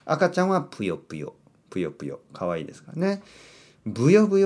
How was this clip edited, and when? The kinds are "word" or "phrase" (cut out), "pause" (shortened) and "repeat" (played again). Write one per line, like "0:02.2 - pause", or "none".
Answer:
none